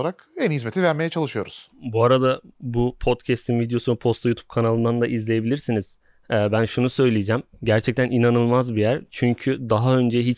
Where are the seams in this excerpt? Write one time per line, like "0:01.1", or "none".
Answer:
none